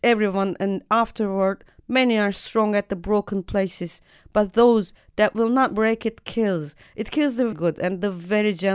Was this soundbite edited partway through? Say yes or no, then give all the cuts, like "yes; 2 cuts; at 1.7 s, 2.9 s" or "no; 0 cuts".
yes; 1 cut; at 7.5 s